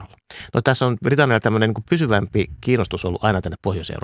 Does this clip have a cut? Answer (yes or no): no